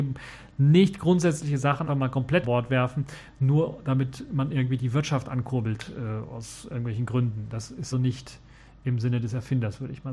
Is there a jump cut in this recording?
yes; 3 cuts; at 1.9 s, 2.4 s, 7.9 s

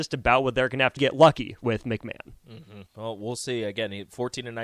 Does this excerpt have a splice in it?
yes; 2 cuts; at 1.0 s, 2.9 s

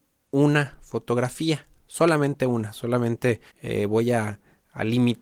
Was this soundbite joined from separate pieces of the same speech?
yes; 1 cut; at 3.5 s

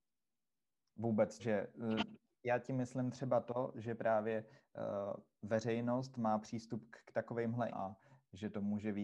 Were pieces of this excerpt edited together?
yes; 2 cuts; at 1.4 s, 7.7 s

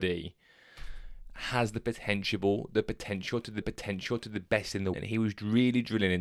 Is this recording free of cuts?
no; 2 cuts; at 3.6 s, 4.9 s

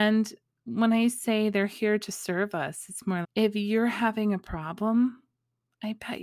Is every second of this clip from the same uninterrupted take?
no; 1 cut; at 3.2 s

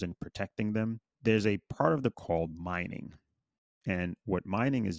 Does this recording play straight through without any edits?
no; 2 cuts; at 1.1 s, 2.1 s

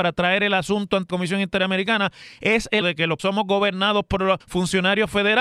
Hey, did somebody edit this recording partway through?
yes; 4 cuts; at 1.1 s, 2.8 s, 3.2 s, 4.4 s

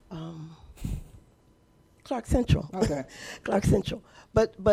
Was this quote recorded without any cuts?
yes; 0 cuts

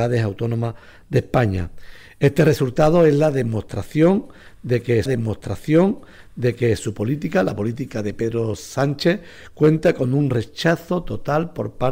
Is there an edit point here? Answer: yes; 1 cut; at 5.1 s

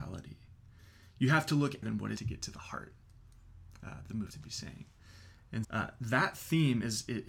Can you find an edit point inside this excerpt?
yes; 4 cuts; at 1.8 s, 2.2 s, 4.3 s, 5.6 s

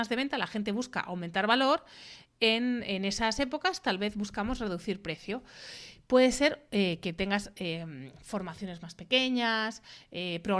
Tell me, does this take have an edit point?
no; 0 cuts

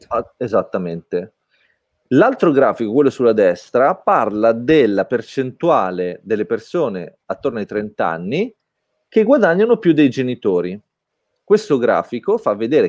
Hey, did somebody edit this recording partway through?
no; 0 cuts

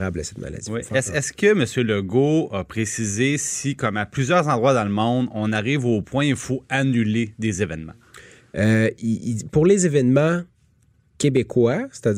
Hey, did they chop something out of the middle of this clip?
no; 0 cuts

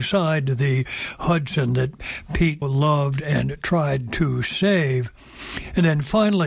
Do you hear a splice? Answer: yes; 1 cut; at 2.6 s

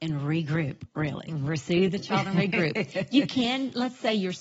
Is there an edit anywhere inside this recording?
no; 0 cuts

